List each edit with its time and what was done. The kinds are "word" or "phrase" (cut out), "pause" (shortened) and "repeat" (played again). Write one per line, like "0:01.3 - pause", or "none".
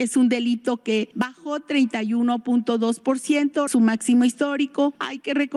0:03.7 - phrase